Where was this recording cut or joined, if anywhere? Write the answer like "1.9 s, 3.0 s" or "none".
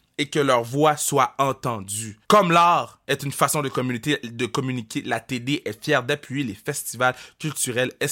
2.2 s, 3.0 s